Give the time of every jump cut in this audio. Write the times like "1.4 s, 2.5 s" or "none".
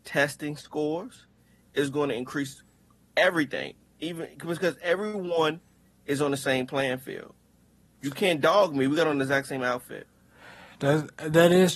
none